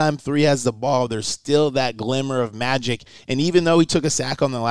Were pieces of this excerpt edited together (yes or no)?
no